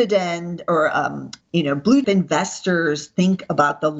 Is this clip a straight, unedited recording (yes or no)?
no